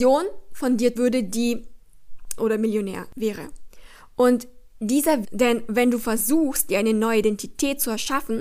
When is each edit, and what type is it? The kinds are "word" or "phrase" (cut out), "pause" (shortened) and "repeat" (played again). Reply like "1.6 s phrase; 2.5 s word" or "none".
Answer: 1.0 s word; 2.4 s phrase; 5.2 s phrase